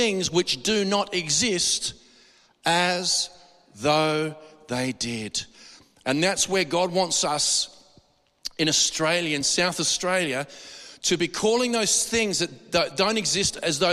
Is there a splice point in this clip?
no; 0 cuts

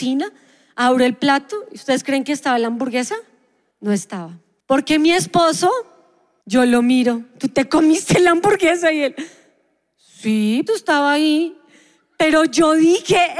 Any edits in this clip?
yes; 1 cut; at 10.7 s

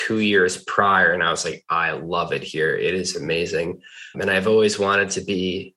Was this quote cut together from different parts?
yes; 1 cut; at 4.1 s

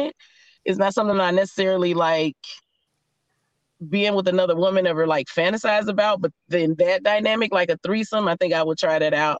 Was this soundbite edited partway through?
no; 0 cuts

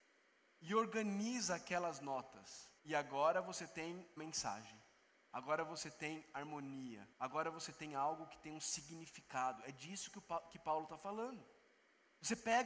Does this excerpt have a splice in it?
yes; 3 cuts; at 2.8 s, 4.2 s, 7.1 s

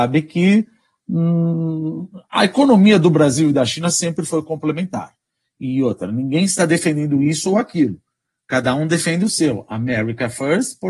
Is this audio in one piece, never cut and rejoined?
yes; 0 cuts

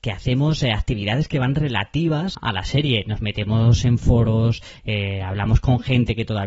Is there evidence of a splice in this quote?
yes; 1 cut; at 2.3 s

